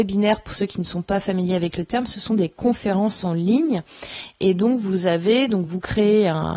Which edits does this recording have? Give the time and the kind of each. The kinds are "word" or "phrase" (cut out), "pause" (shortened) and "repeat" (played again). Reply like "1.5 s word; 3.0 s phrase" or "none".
none